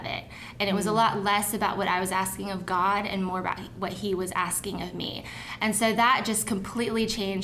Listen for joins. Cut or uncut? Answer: uncut